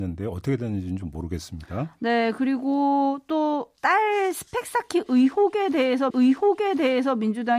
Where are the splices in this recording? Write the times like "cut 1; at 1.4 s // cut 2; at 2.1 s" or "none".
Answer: cut 1; at 3.8 s // cut 2; at 6.1 s